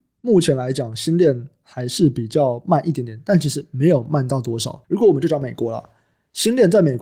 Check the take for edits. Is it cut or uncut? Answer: cut